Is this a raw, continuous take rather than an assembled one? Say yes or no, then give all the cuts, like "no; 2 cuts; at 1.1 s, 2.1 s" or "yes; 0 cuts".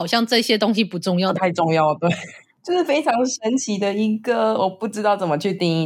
yes; 0 cuts